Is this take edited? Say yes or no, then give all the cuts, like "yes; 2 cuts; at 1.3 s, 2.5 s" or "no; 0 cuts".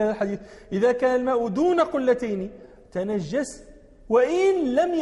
no; 0 cuts